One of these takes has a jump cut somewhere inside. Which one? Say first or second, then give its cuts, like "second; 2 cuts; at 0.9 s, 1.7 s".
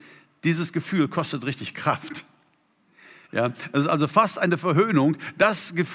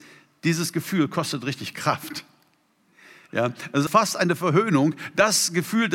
second; 1 cut; at 3.9 s